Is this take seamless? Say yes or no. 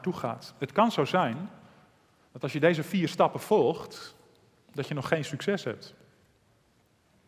yes